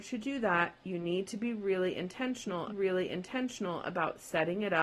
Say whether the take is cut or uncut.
cut